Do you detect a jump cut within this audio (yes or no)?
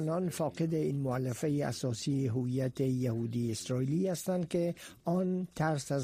no